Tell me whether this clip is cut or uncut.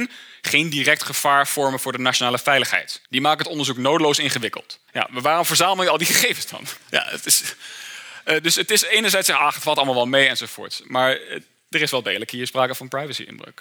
cut